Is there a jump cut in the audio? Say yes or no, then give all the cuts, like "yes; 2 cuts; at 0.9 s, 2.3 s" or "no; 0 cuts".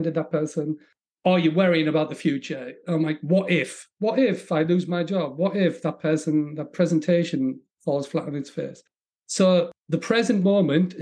no; 0 cuts